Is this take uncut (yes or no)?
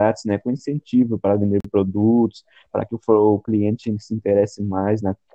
yes